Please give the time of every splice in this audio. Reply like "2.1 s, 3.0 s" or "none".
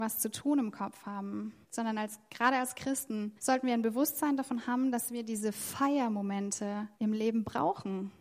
1.6 s, 3.4 s, 6.9 s